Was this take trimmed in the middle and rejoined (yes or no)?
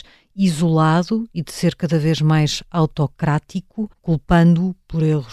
yes